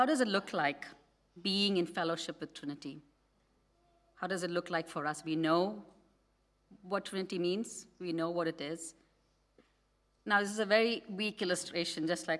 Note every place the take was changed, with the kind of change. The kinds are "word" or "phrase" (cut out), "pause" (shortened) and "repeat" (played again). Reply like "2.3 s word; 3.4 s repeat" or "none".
none